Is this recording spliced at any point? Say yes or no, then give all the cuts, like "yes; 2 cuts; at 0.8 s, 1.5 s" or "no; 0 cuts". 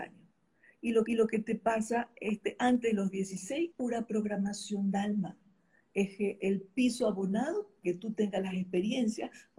yes; 4 cuts; at 1.1 s, 3.7 s, 4.9 s, 7.8 s